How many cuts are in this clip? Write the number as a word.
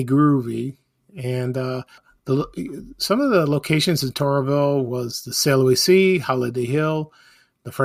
one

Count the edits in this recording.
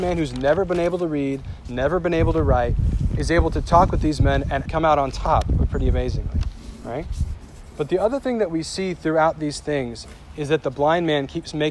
one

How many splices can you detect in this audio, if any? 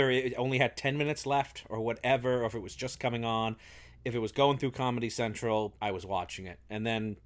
one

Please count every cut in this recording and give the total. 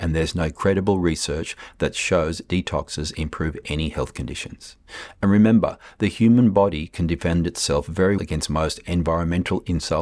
one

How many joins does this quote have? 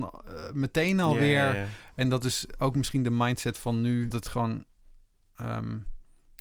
one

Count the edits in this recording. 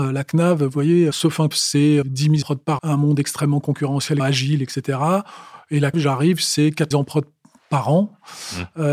eight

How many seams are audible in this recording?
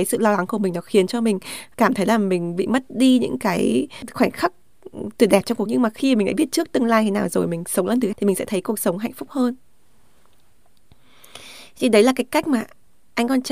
two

